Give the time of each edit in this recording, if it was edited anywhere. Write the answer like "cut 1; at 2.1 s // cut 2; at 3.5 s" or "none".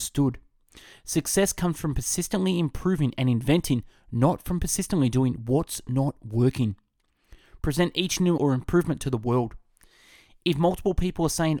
cut 1; at 8.4 s